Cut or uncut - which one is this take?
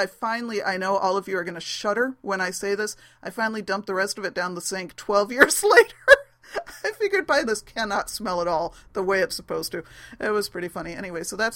cut